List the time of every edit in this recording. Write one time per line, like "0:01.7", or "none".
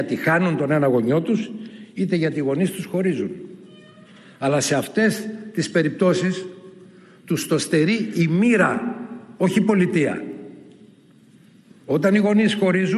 none